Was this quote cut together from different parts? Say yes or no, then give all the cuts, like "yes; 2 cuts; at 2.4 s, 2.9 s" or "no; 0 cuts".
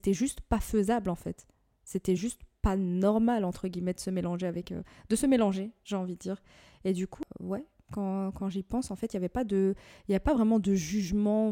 no; 0 cuts